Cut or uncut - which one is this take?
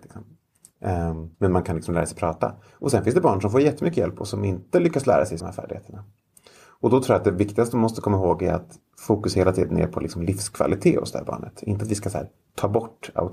cut